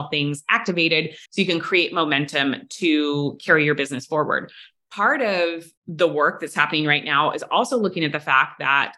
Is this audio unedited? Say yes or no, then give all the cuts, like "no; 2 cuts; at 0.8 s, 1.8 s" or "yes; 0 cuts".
no; 2 cuts; at 1.2 s, 5.8 s